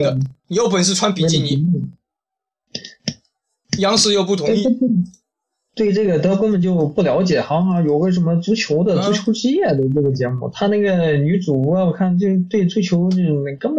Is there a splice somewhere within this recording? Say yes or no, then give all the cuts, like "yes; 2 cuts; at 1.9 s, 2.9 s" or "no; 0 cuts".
no; 0 cuts